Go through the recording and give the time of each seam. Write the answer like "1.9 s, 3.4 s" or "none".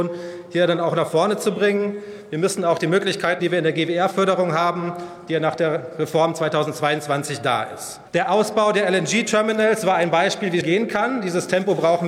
3.4 s, 8.1 s, 10.6 s

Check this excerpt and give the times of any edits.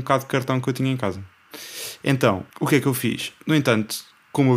2.5 s

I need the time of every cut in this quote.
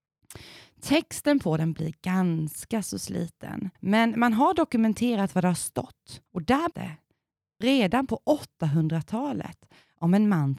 1.7 s, 3.8 s, 6.3 s, 6.7 s

